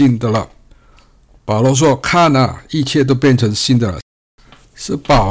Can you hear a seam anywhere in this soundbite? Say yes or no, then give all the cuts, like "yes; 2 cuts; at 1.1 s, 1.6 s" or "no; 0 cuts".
yes; 1 cut; at 4.1 s